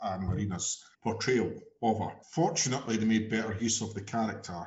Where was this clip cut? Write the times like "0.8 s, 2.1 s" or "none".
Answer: 0.9 s, 2.2 s